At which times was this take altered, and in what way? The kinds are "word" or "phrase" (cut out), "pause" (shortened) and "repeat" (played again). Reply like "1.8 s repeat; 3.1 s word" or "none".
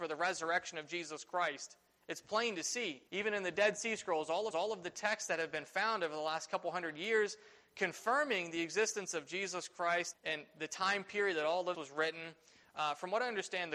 3.1 s pause; 4.5 s repeat; 10.1 s word; 11.7 s word